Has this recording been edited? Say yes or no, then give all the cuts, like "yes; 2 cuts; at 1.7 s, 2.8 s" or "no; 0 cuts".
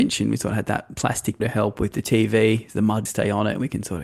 yes; 2 cuts; at 1.4 s, 3.1 s